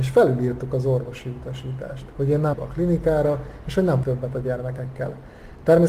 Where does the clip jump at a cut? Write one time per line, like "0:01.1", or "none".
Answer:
0:02.5
0:04.0